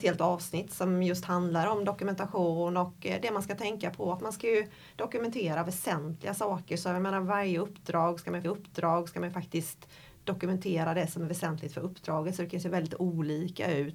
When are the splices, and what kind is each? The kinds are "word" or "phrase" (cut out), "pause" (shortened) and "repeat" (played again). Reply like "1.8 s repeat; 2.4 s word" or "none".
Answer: 8.4 s repeat